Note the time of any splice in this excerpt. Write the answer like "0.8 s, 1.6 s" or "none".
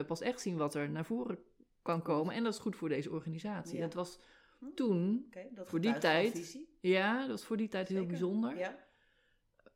none

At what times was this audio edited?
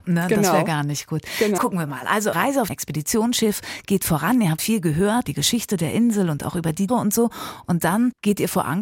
1.6 s, 2.3 s, 2.7 s, 4.6 s, 5.2 s, 6.9 s

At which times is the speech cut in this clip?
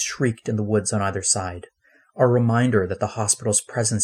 none

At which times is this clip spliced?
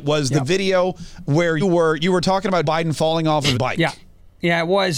1.6 s, 2.6 s, 3.5 s

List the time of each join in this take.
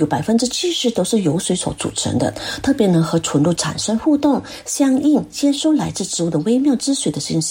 none

